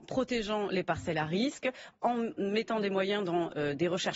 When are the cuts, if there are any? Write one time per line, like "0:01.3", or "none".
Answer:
none